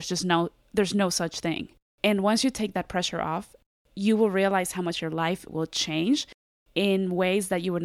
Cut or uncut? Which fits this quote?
uncut